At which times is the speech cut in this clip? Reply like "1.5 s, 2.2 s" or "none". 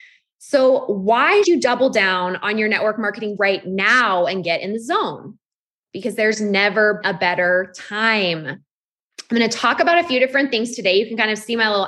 1.4 s, 3.4 s, 7.0 s

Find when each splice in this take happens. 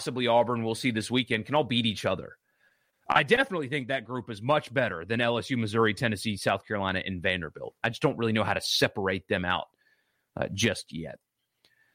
none

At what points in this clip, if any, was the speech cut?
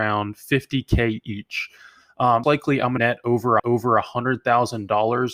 2.4 s, 3.0 s, 3.6 s

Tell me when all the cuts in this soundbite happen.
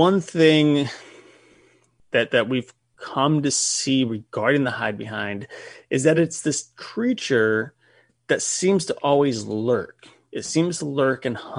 none

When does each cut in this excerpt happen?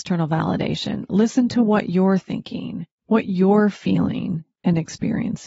2.9 s

